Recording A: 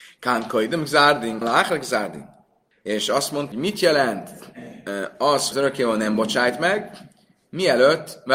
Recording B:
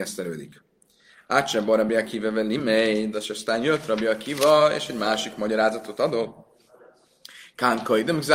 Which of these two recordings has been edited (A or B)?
A